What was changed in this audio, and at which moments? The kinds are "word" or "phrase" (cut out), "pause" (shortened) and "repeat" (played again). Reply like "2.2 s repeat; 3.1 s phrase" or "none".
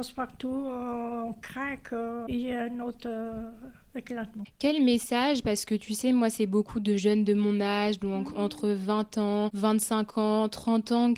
none